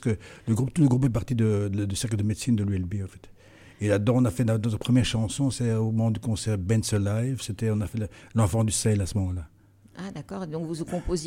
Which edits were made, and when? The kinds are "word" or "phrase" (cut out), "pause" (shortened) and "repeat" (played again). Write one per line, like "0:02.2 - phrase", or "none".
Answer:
none